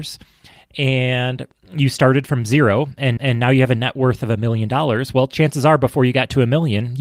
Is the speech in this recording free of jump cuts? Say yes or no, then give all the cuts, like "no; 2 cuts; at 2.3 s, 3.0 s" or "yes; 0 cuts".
no; 1 cut; at 3.2 s